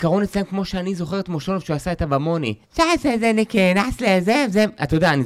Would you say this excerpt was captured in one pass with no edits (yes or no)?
no